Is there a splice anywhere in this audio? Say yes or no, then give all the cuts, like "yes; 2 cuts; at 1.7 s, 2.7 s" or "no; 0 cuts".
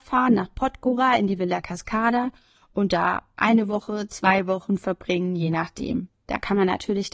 no; 0 cuts